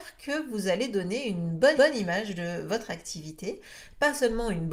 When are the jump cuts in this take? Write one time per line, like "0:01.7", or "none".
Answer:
0:01.8

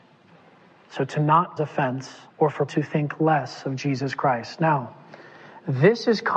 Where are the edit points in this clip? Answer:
0:01.6
0:02.3
0:02.7

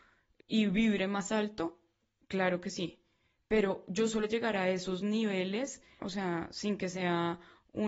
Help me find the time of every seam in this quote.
0:04.2
0:06.0

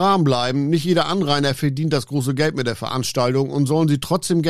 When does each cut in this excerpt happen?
none

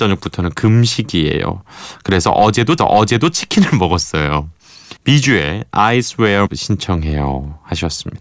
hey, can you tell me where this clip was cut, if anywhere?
0:02.8
0:05.0
0:06.5

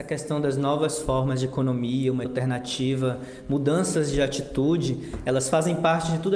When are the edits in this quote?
0:02.3

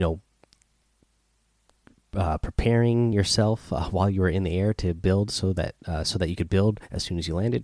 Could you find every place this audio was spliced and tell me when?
none

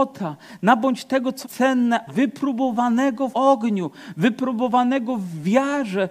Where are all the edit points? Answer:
0:01.4
0:02.1
0:03.3

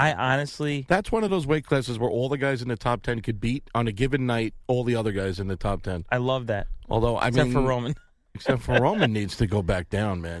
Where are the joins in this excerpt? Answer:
none

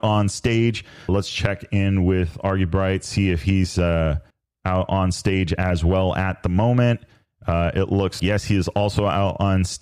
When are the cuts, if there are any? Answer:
0:01.1
0:04.3
0:08.2

